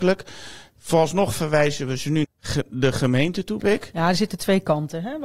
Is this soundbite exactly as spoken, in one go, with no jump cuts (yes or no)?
no